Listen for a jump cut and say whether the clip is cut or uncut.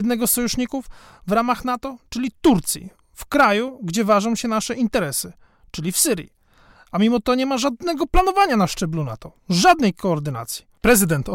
uncut